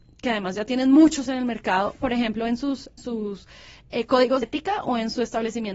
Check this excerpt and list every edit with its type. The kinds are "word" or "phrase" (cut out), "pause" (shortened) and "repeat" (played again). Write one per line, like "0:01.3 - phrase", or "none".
0:01.3 - word
0:03.0 - word
0:04.4 - word